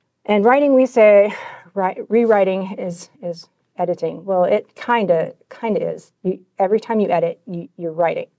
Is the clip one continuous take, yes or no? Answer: no